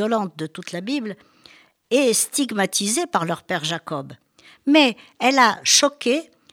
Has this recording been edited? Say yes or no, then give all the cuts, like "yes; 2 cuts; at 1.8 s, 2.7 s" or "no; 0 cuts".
no; 0 cuts